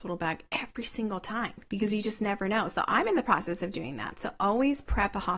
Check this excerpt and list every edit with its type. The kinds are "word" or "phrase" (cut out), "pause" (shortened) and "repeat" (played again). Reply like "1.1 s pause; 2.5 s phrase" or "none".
none